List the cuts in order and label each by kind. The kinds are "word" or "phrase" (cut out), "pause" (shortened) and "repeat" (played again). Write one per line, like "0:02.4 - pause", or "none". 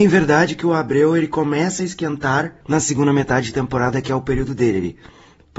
0:02.6 - pause